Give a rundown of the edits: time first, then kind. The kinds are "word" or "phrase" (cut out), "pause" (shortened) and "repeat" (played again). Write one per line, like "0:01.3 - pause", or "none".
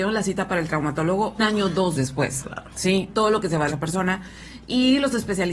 0:01.4 - word
0:01.9 - word
0:03.1 - phrase
0:03.7 - phrase